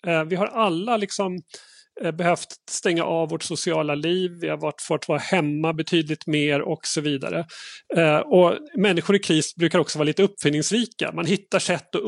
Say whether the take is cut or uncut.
uncut